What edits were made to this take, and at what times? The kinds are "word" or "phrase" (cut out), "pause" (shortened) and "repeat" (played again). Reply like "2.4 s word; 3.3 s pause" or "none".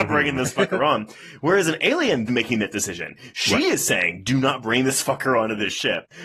2.3 s phrase